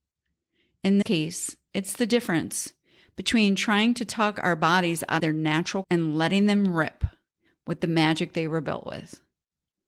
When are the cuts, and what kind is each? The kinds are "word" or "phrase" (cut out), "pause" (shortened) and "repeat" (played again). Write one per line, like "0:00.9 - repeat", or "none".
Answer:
0:01.0 - word
0:05.2 - word
0:05.8 - word